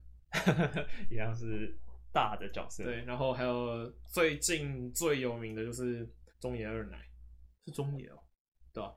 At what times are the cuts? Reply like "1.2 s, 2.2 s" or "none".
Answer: 6.3 s, 7.6 s